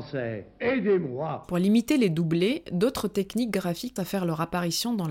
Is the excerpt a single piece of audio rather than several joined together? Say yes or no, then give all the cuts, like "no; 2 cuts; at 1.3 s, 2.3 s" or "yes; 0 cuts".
no; 1 cut; at 4.0 s